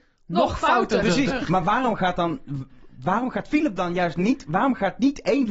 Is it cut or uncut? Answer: uncut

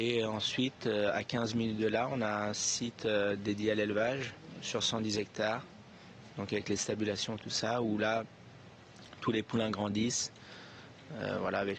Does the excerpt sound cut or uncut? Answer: uncut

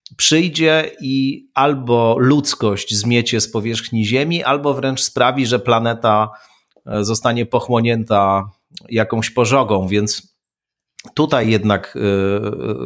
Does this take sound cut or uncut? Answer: uncut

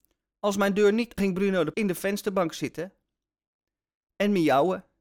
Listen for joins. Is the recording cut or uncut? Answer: cut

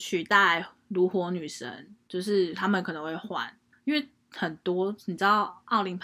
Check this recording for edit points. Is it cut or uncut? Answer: cut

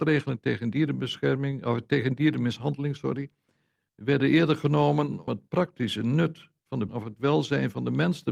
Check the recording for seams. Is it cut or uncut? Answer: cut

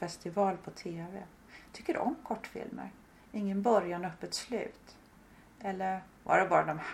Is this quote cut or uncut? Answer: uncut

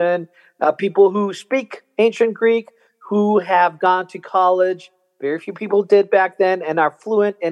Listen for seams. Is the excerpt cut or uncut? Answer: uncut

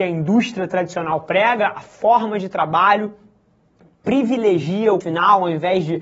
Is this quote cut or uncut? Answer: cut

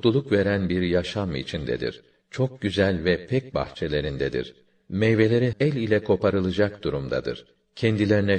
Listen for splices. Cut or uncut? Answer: cut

